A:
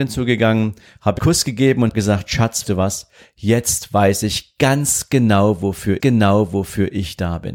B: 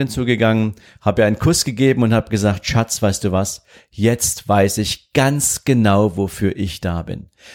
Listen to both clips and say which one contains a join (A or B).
A